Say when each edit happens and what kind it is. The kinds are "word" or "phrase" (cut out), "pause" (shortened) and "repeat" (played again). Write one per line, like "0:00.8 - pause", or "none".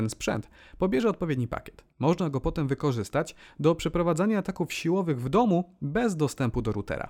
0:01.9 - pause